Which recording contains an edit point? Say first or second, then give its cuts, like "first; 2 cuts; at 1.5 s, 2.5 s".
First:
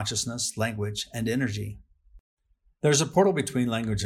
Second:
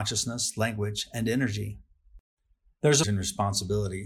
second; 1 cut; at 3.0 s